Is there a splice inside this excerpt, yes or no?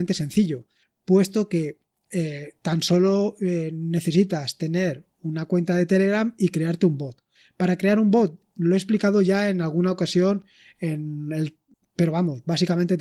no